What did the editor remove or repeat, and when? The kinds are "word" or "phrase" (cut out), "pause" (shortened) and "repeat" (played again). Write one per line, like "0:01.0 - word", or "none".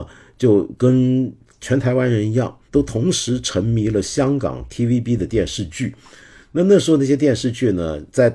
none